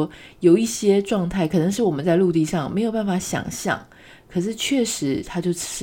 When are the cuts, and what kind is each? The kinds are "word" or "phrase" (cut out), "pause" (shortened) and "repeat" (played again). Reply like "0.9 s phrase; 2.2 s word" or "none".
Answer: none

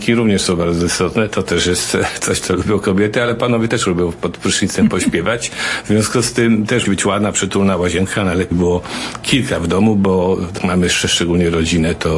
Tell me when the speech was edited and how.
6.8 s word; 8.5 s phrase; 10.6 s word

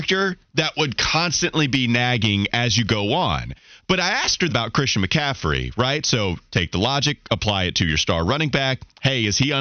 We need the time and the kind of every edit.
4.5 s word

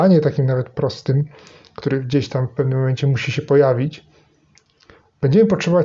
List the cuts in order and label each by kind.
none

